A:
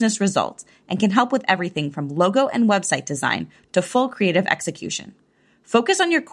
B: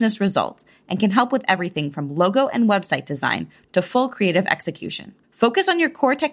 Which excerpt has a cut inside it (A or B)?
B